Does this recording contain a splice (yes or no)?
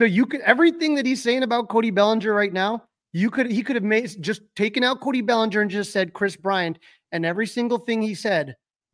no